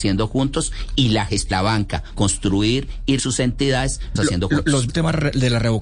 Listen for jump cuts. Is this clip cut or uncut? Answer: cut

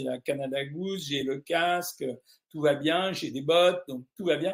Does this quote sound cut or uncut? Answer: uncut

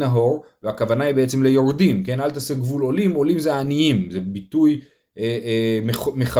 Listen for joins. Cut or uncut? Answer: uncut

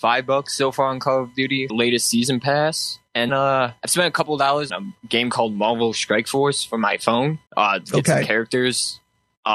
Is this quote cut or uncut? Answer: cut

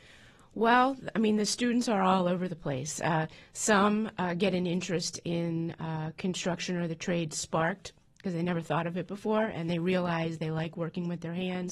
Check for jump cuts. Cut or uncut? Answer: uncut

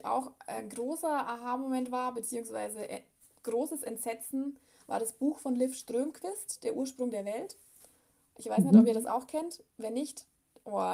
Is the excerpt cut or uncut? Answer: uncut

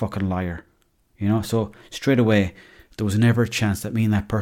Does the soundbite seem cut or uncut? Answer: uncut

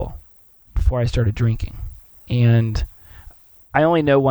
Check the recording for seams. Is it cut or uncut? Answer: cut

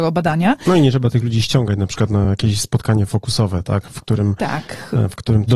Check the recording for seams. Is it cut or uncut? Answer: uncut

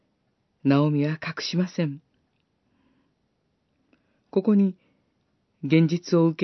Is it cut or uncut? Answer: uncut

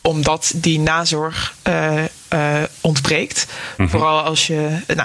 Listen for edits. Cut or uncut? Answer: uncut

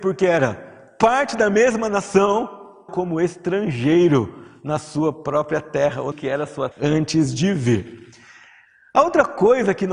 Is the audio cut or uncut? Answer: cut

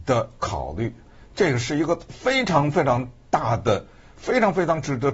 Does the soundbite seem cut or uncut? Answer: uncut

